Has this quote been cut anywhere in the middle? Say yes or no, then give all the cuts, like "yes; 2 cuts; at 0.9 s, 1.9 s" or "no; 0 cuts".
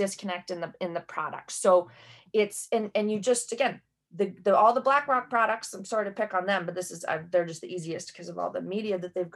no; 0 cuts